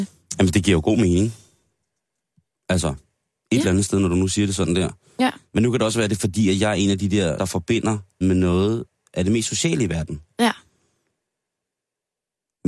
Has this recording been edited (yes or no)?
yes